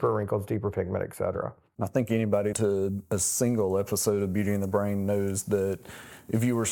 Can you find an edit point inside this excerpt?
yes; 1 cut; at 2.5 s

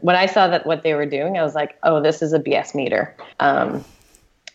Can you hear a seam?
yes; 1 cut; at 3.3 s

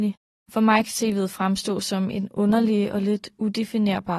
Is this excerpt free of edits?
yes; 0 cuts

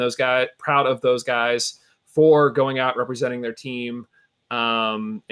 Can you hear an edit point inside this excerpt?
no; 0 cuts

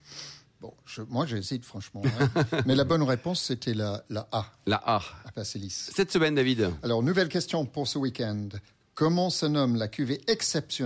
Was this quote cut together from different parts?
no; 0 cuts

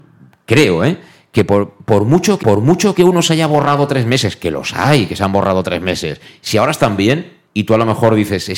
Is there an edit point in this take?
yes; 2 cuts; at 2.4 s, 7.5 s

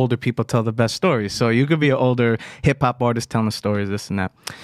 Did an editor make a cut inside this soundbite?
no; 0 cuts

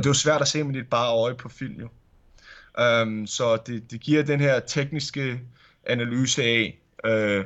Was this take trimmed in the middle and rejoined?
no; 0 cuts

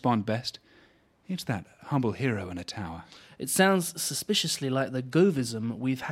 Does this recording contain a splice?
no; 0 cuts

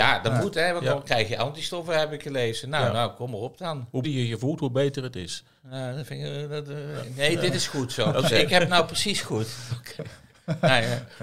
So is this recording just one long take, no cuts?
no; 1 cut; at 4.0 s

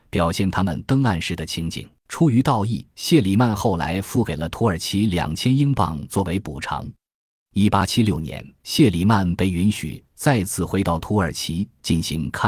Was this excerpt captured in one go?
no; 3 cuts; at 2.0 s, 2.9 s, 8.6 s

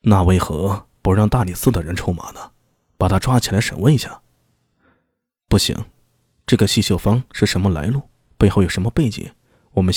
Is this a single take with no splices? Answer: yes; 0 cuts

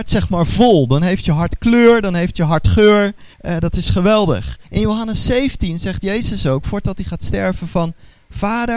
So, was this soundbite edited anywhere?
yes; 2 cuts; at 3.3 s, 4.6 s

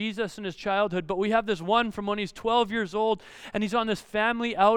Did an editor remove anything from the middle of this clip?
no; 0 cuts

